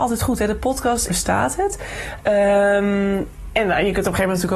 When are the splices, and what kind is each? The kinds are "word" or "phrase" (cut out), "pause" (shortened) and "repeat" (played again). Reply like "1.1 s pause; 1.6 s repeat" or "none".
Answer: 1.1 s phrase